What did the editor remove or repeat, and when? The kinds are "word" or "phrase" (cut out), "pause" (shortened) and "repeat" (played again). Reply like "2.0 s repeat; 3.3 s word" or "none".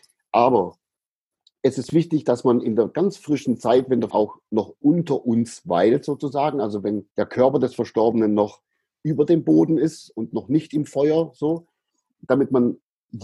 4.1 s word; 7.1 s pause